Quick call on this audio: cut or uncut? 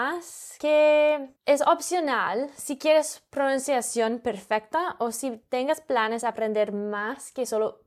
cut